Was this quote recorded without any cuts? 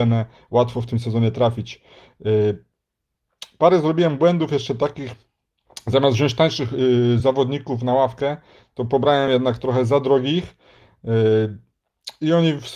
yes; 0 cuts

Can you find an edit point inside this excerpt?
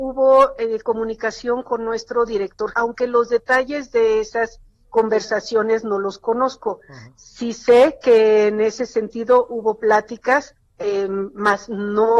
yes; 1 cut; at 2.7 s

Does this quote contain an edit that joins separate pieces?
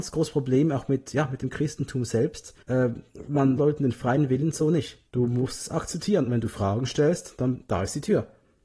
yes; 3 cuts; at 2.6 s, 3.6 s, 5.1 s

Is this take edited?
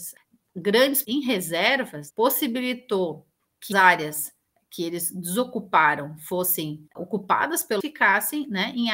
yes; 5 cuts; at 1.0 s, 2.1 s, 3.7 s, 6.9 s, 7.8 s

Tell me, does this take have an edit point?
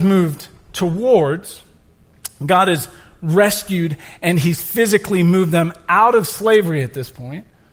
no; 0 cuts

